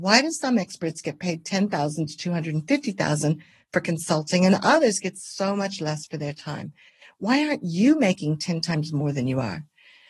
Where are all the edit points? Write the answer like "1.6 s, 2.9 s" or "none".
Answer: none

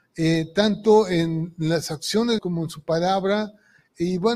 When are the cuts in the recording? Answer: 2.4 s

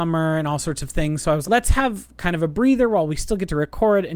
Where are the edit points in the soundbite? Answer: 1.4 s

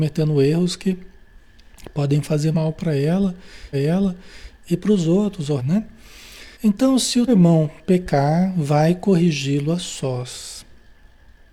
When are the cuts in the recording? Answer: 2.5 s, 3.7 s, 5.6 s, 6.5 s, 7.3 s

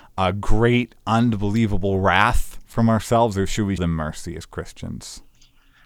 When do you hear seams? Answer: 3.8 s

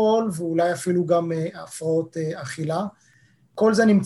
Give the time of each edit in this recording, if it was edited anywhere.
none

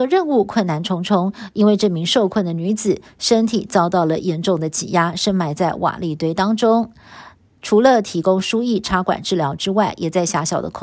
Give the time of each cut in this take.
none

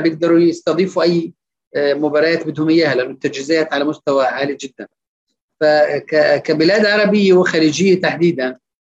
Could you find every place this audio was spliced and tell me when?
none

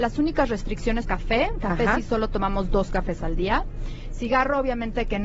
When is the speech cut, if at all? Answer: 1.0 s

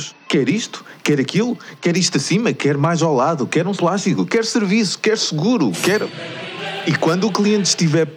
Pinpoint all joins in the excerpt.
3.8 s

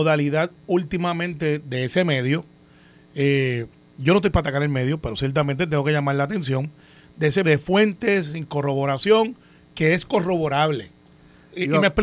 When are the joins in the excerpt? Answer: 7.4 s

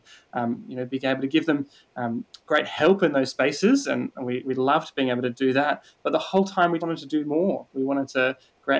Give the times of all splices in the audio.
6.8 s

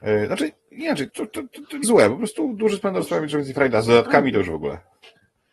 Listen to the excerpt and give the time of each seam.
1.1 s, 1.8 s

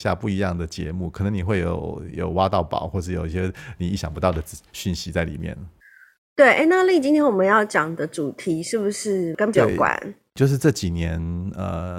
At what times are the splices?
9.5 s

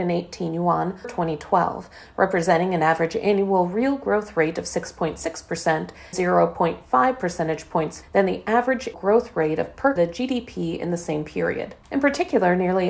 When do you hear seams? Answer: 1.0 s, 6.1 s, 8.0 s, 8.9 s, 10.0 s, 11.8 s

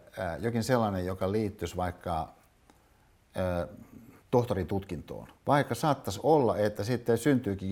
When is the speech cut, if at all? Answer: 4.2 s, 5.4 s

